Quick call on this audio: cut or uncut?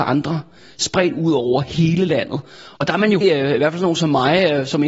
cut